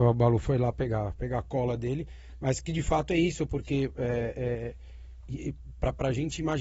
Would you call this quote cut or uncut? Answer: uncut